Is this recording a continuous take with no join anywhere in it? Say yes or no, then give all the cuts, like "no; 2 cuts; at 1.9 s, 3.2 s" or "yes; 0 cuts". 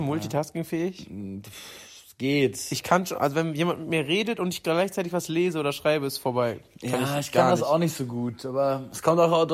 yes; 0 cuts